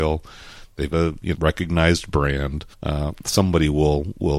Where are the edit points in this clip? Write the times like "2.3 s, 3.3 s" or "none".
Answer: 0.9 s, 1.4 s, 2.7 s